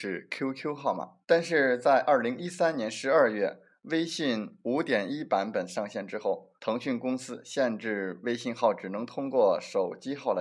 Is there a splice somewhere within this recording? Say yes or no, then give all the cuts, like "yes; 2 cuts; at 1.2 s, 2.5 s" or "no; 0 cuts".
yes; 2 cuts; at 1.2 s, 6.6 s